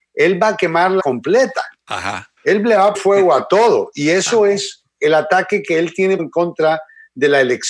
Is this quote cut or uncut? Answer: cut